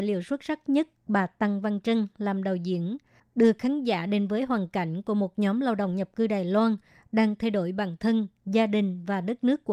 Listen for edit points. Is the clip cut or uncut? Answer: uncut